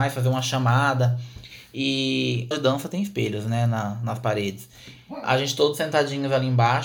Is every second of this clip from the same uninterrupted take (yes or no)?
no